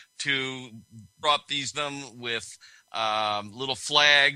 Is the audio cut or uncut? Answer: cut